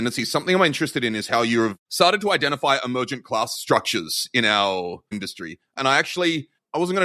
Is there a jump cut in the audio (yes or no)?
yes